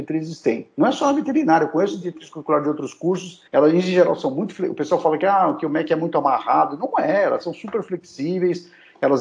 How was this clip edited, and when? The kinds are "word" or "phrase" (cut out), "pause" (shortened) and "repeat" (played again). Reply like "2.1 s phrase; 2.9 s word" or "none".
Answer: 3.5 s pause

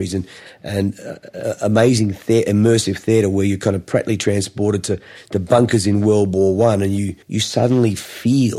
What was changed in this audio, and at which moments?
7.2 s pause

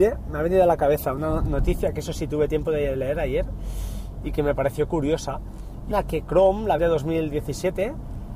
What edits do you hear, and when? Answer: 5.9 s phrase; 6.8 s word

